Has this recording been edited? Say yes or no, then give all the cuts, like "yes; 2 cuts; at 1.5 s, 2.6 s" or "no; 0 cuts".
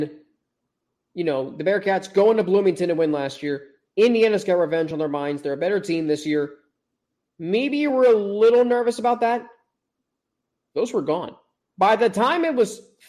no; 0 cuts